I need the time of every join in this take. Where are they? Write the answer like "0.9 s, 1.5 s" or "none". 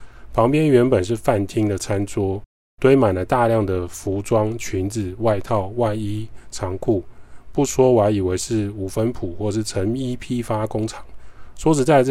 none